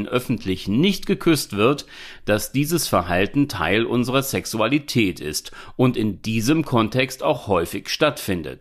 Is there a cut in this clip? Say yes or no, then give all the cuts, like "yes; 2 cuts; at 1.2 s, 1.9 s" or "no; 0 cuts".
no; 0 cuts